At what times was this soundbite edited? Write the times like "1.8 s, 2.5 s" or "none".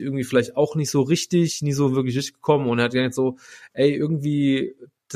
none